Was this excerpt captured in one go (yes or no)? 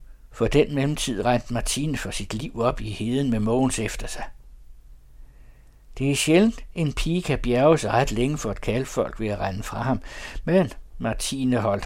yes